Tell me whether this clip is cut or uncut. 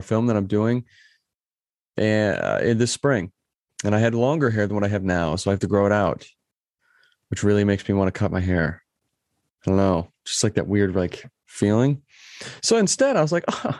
uncut